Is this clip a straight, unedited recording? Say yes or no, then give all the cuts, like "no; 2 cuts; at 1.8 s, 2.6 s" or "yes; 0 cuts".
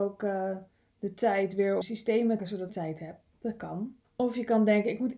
no; 4 cuts; at 1.8 s, 2.4 s, 2.7 s, 4.0 s